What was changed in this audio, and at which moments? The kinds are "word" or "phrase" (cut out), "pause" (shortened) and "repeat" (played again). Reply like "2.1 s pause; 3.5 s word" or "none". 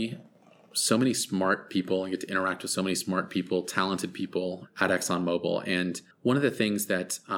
6.1 s pause